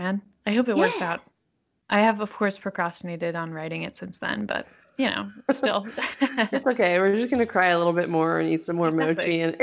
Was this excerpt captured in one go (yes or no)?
yes